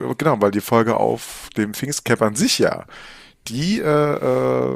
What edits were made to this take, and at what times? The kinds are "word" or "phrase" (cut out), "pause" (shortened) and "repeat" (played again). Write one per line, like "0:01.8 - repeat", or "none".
none